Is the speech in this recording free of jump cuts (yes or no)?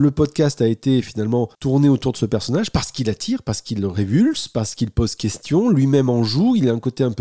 no